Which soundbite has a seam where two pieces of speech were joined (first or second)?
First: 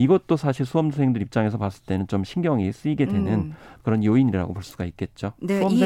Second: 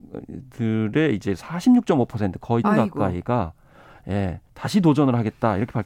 second